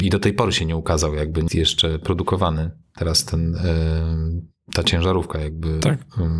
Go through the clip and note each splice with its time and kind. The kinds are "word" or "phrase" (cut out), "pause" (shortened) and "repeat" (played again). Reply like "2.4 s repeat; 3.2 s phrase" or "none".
1.5 s word